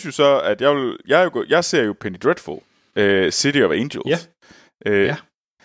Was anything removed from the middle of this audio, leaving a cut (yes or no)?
no